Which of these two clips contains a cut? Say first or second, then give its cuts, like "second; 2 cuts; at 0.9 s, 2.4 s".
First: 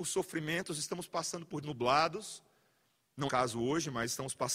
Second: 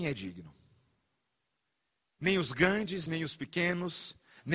first; 2 cuts; at 1.6 s, 3.3 s